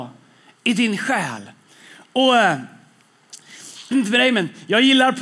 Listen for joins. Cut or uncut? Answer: cut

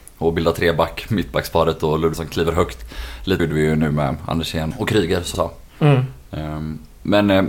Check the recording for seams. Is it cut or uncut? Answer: cut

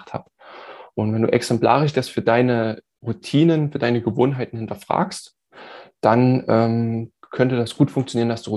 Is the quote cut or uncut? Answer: uncut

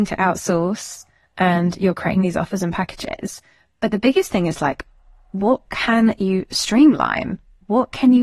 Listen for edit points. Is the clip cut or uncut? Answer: uncut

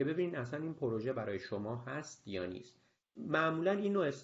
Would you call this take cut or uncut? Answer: uncut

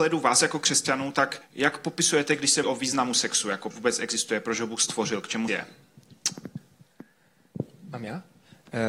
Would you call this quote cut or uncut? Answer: cut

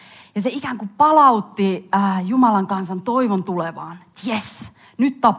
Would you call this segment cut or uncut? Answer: uncut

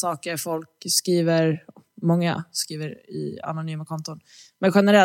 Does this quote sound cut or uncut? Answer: uncut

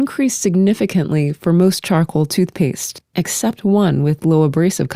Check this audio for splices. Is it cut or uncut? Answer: uncut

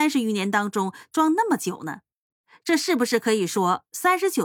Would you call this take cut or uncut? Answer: uncut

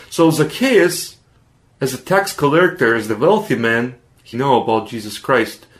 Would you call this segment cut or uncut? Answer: cut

